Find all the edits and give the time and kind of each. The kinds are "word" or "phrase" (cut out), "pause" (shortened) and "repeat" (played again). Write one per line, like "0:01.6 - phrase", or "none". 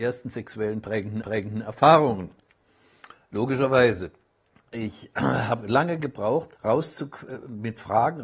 0:01.2 - repeat
0:04.4 - pause
0:06.6 - pause

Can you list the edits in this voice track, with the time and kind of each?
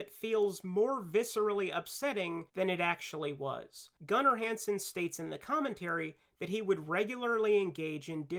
0:02.5 - pause
0:04.0 - pause

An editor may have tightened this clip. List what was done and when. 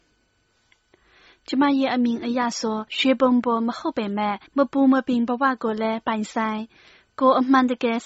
0:02.9 - pause
0:04.5 - pause

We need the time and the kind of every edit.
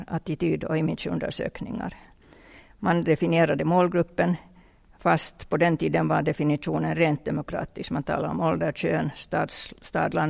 none

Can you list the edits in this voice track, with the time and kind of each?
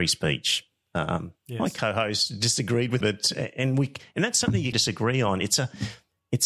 0:03.0 - word
0:04.7 - word

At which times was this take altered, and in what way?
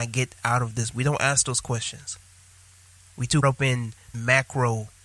0:00.9 - word
0:03.4 - word
0:04.1 - word

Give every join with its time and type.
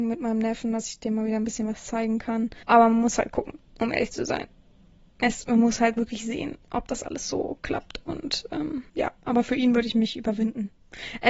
0:02.6 - pause
0:03.7 - pause
0:04.9 - pause
0:08.9 - pause

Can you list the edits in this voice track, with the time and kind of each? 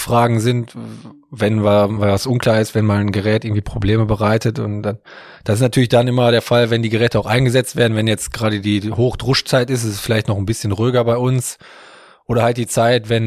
none

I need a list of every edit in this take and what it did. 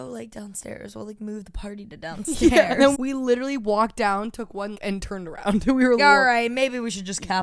0:02.9 - word
0:04.7 - word
0:06.0 - phrase

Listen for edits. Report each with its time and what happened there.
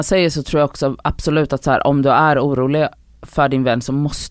none

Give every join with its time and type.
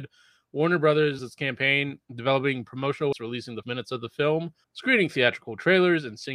0:01.2 - word
0:02.0 - pause
0:03.1 - word
0:03.6 - phrase
0:04.6 - pause

